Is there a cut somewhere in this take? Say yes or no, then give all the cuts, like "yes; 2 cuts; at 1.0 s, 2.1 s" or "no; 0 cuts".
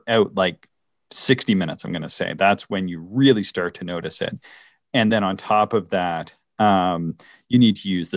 no; 0 cuts